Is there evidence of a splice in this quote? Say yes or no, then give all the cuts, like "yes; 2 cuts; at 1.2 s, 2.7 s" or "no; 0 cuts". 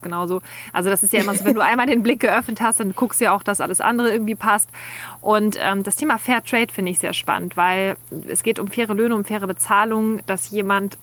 no; 0 cuts